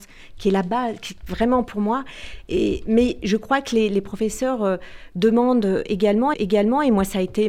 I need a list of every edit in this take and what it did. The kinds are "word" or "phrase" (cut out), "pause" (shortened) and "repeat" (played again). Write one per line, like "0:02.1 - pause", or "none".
0:06.3 - repeat